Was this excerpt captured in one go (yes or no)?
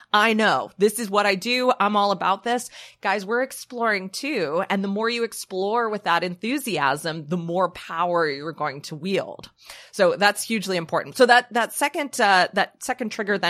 yes